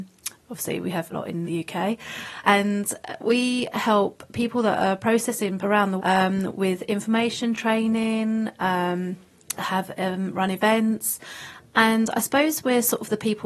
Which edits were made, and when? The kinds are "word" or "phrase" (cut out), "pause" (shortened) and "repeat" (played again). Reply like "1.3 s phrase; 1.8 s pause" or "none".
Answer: 1.1 s word; 1.4 s word; 2.4 s word; 5.6 s word; 6.0 s word; 9.6 s word